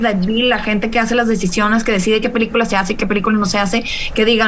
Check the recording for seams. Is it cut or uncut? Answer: uncut